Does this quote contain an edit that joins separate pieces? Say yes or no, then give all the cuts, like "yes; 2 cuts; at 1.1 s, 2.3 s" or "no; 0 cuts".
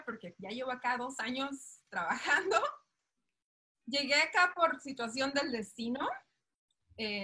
no; 0 cuts